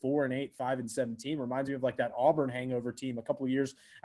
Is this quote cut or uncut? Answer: uncut